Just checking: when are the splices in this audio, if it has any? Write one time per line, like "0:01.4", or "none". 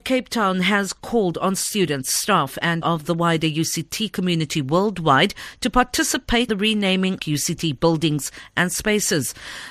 0:02.8
0:06.5
0:07.2